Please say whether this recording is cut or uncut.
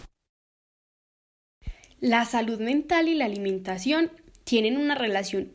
uncut